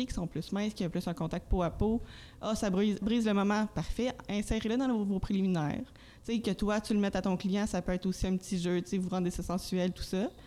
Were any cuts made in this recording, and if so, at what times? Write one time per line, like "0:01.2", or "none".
0:03.0

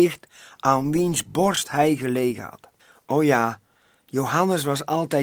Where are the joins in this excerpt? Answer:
0:02.8

